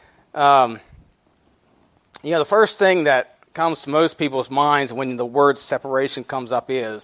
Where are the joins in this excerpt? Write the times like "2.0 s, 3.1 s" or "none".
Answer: 3.5 s